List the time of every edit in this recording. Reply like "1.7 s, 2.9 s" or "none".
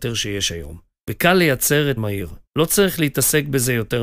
1.0 s, 2.0 s, 2.5 s